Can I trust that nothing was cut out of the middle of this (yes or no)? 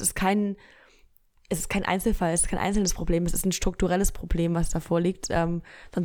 yes